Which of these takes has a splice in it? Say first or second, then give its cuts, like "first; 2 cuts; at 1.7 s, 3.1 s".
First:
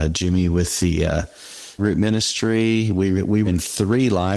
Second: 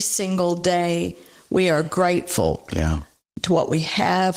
first; 2 cuts; at 1.8 s, 3.5 s